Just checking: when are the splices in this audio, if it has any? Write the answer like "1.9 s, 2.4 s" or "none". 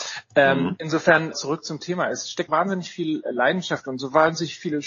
1.3 s, 2.5 s